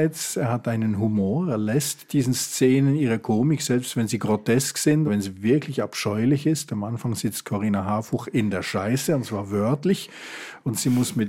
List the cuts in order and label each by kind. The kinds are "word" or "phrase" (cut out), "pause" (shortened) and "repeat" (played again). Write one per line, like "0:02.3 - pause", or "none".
0:05.1 - word